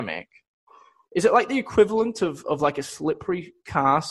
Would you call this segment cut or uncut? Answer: uncut